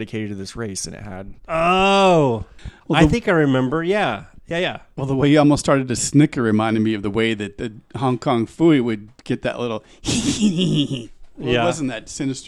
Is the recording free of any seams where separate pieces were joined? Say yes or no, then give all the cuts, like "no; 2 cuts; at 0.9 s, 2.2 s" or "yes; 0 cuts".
no; 1 cut; at 2.8 s